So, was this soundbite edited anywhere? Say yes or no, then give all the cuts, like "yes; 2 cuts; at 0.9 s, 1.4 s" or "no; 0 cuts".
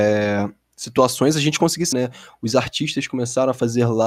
yes; 1 cut; at 1.9 s